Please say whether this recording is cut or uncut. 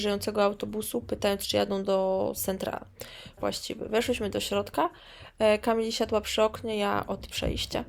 cut